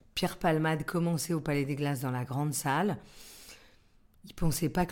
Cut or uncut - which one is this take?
uncut